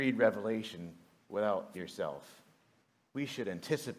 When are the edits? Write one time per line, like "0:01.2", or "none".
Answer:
0:01.7